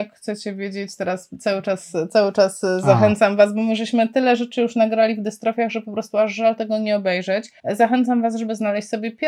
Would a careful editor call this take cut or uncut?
cut